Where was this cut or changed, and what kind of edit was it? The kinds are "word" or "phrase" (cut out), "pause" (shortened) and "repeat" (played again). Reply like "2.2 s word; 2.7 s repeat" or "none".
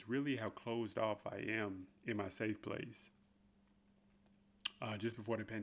2.0 s pause